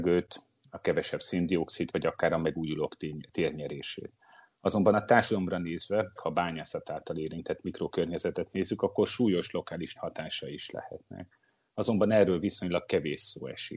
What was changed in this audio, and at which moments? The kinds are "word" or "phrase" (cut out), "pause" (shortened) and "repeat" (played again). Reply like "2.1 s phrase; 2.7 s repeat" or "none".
1.9 s word; 6.2 s word; 10.0 s word